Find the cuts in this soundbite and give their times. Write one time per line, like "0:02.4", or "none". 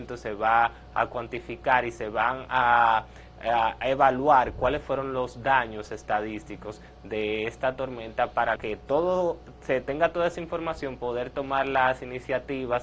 0:08.6